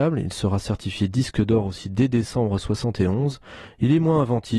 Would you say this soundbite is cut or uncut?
uncut